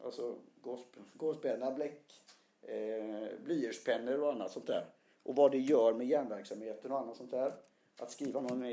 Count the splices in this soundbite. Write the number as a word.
zero